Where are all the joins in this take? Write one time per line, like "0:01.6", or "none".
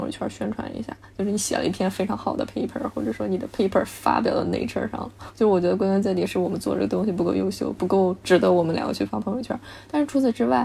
none